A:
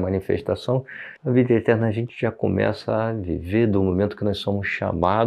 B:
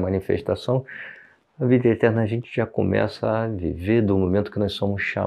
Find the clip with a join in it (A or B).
A